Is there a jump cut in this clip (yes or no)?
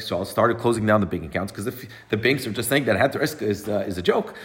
no